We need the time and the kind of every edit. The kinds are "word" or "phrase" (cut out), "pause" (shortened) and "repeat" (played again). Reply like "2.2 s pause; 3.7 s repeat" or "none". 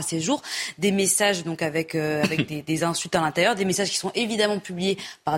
none